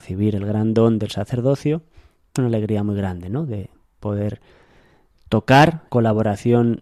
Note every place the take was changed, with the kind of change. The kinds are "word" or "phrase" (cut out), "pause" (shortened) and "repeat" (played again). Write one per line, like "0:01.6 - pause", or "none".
0:02.4 - word
0:03.8 - pause
0:05.9 - word